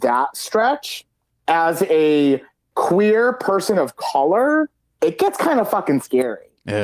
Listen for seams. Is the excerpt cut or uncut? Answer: uncut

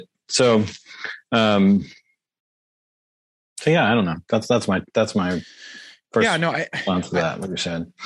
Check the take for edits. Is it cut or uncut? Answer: uncut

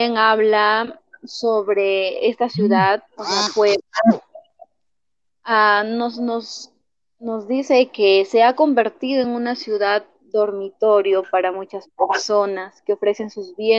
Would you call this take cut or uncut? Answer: uncut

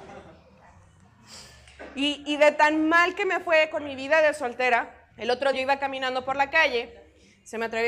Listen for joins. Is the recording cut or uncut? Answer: cut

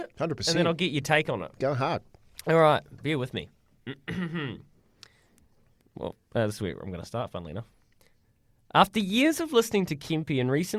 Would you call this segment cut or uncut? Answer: uncut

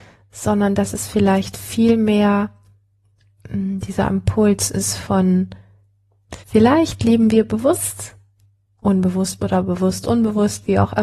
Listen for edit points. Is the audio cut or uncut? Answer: cut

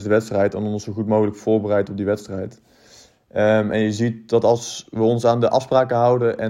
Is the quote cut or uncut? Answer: uncut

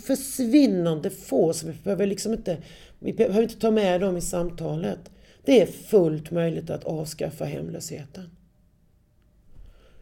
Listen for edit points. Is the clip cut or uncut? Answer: uncut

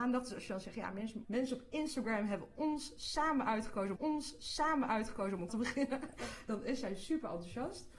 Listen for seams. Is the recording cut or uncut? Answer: cut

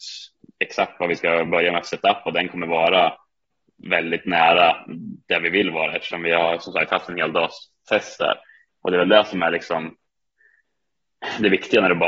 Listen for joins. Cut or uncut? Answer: uncut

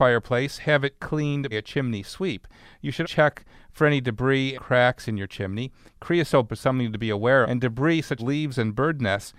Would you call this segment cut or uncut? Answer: cut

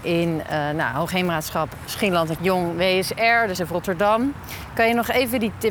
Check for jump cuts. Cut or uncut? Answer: cut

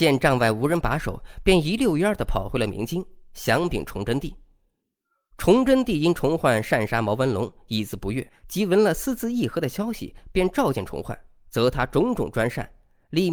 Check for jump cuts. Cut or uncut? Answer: cut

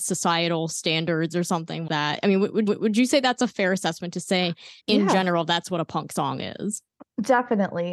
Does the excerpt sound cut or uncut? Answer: cut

